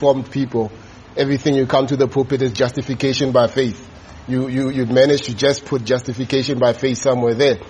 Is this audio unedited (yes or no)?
yes